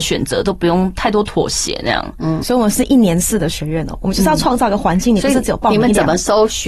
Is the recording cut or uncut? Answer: cut